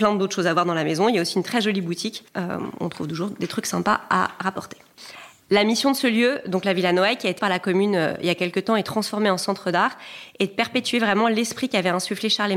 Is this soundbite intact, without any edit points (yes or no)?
no